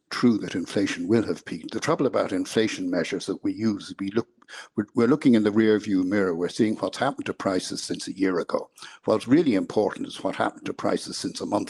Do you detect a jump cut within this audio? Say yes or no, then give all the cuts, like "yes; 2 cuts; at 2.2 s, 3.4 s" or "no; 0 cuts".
no; 0 cuts